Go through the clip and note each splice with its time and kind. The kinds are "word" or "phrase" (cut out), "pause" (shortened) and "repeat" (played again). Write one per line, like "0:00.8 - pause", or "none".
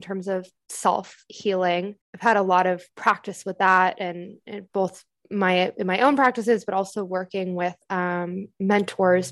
0:02.0 - pause
0:02.9 - pause
0:07.8 - pause